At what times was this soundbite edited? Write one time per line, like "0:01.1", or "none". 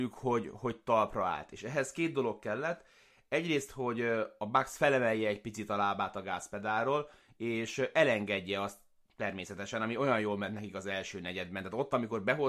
none